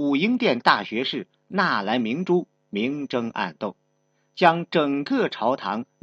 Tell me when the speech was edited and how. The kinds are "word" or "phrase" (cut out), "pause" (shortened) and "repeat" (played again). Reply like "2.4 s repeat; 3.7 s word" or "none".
none